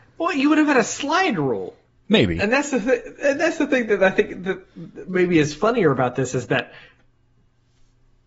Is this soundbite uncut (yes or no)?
yes